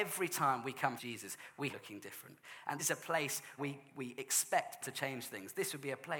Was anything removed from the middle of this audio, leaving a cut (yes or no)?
yes